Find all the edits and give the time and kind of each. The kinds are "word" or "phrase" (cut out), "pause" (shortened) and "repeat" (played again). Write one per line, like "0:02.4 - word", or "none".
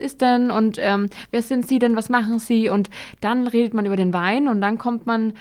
none